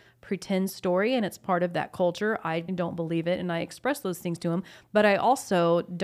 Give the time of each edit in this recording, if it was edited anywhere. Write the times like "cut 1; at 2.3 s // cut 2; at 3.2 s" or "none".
cut 1; at 2.7 s